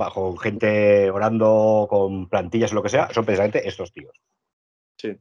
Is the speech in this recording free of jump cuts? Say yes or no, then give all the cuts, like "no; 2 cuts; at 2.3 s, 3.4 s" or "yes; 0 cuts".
yes; 0 cuts